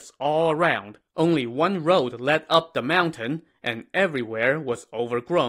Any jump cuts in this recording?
yes; 1 cut; at 1.1 s

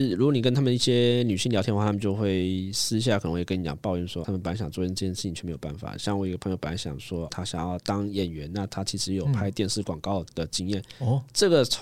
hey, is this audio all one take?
no; 2 cuts; at 4.2 s, 7.3 s

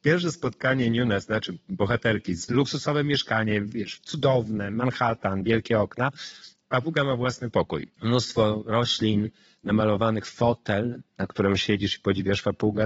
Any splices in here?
yes; 2 cuts; at 2.5 s, 7.9 s

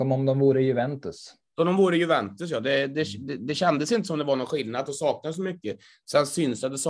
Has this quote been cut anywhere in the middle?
no; 0 cuts

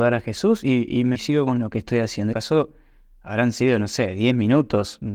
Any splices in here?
yes; 2 cuts; at 1.1 s, 2.3 s

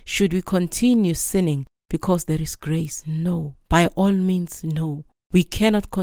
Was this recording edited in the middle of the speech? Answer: yes; 1 cut; at 3.6 s

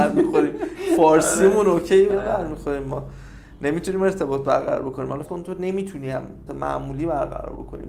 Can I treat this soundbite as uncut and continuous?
no; 3 cuts; at 2.1 s, 5.2 s, 6.5 s

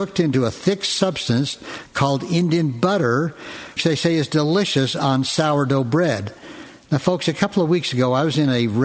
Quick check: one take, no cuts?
no; 1 cut; at 3.8 s

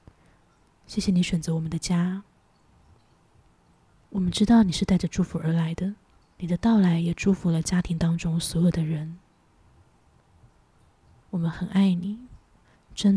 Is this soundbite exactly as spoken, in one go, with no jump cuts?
no; 1 cut; at 6.2 s

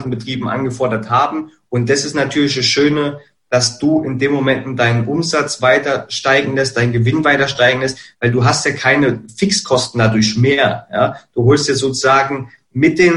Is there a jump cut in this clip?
no; 0 cuts

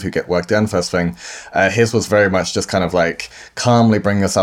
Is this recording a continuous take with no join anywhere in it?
yes; 0 cuts

